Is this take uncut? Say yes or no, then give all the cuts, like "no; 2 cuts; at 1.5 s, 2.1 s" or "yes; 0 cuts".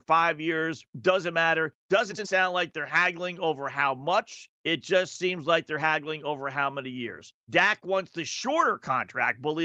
no; 4 cuts; at 0.9 s, 1.8 s, 4.5 s, 7.4 s